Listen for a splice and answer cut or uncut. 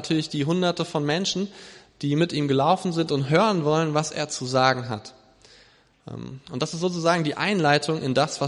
uncut